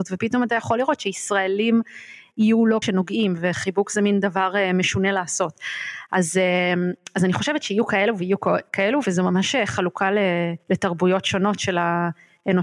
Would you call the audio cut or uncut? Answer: cut